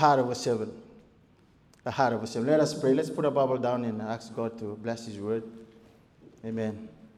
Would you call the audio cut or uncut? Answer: uncut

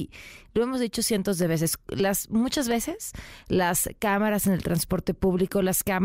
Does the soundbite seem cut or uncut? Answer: uncut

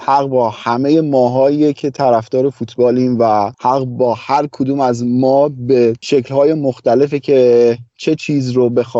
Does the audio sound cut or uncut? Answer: uncut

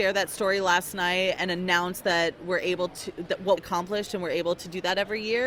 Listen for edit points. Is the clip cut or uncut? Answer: cut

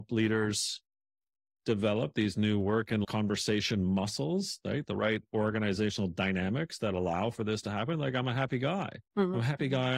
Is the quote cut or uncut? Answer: cut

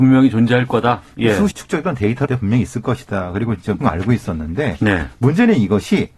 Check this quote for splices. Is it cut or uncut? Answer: cut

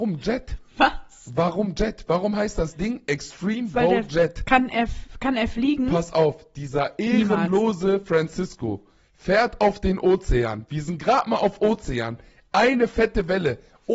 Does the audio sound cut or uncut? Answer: uncut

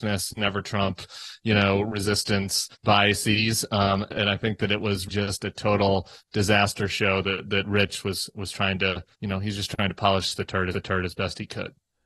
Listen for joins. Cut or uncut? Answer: cut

